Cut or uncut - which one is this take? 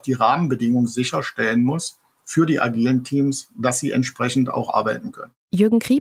uncut